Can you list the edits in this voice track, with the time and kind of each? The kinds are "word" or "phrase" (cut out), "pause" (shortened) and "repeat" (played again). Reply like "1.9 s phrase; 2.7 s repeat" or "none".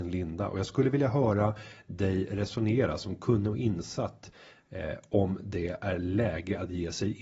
none